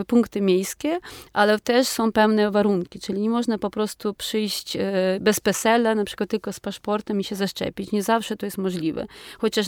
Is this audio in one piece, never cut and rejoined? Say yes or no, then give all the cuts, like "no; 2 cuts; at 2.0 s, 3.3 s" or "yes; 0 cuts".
yes; 0 cuts